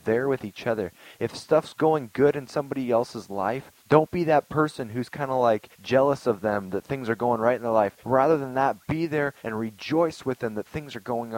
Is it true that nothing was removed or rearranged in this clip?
no; 4 cuts; at 3.8 s, 5.7 s, 8.0 s, 9.4 s

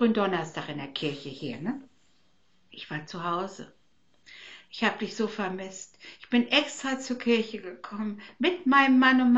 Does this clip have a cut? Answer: no; 0 cuts

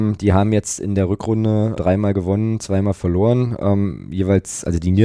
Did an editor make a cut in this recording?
yes; 1 cut; at 1.8 s

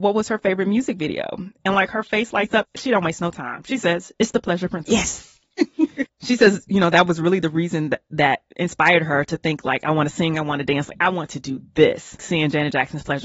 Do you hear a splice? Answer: yes; 1 cut; at 12.2 s

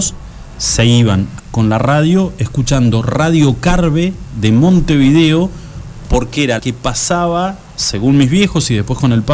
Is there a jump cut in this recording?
yes; 2 cuts; at 1.4 s, 6.6 s

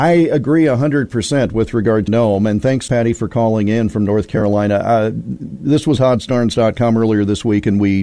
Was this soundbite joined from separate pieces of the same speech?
yes; 3 cuts; at 2.1 s, 2.9 s, 6.0 s

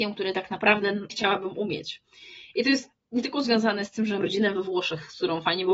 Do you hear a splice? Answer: yes; 2 cuts; at 1.1 s, 4.2 s

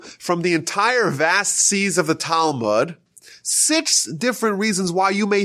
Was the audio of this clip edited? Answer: no; 0 cuts

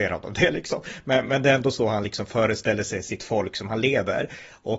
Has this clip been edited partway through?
no; 0 cuts

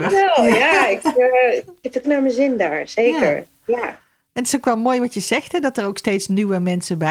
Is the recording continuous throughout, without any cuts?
no; 1 cut; at 2.0 s

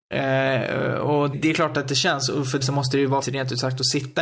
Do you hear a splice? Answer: yes; 3 cuts; at 1.3 s, 2.6 s, 3.2 s

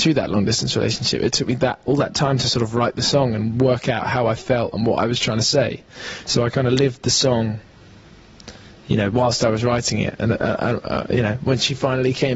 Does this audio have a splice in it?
no; 0 cuts

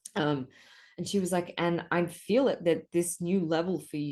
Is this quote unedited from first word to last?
yes; 0 cuts

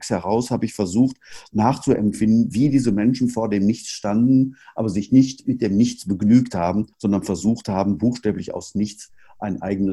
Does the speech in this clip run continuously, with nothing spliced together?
no; 1 cut; at 6.9 s

